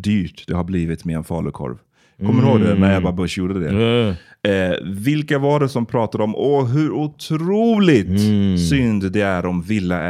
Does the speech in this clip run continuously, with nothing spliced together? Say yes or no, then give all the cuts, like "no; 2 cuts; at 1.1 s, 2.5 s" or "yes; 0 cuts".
yes; 0 cuts